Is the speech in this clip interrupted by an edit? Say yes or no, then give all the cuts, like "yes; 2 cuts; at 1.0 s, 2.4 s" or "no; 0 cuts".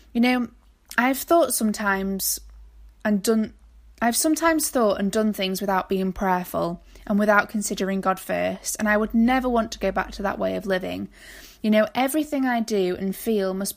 no; 0 cuts